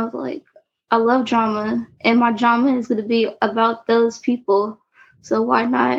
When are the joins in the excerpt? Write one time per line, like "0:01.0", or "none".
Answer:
none